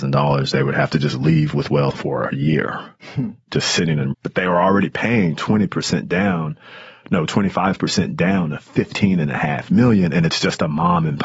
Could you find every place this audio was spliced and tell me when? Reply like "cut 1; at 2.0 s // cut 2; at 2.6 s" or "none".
cut 1; at 1.9 s // cut 2; at 4.1 s